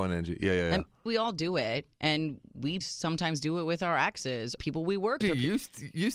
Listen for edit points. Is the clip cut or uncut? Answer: cut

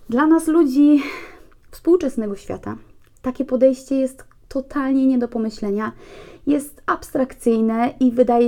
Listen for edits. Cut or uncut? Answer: uncut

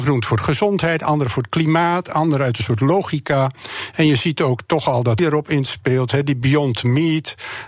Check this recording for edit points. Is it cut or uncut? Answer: cut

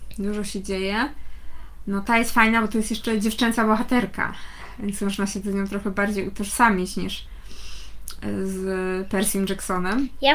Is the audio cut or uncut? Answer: uncut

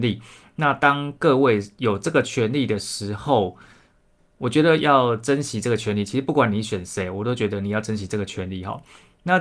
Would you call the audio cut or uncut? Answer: uncut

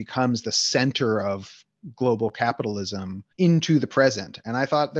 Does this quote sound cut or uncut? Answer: cut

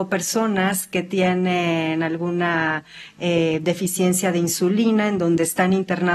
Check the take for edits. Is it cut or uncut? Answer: uncut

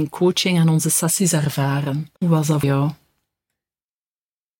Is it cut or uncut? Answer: cut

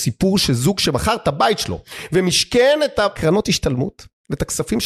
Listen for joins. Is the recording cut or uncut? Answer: uncut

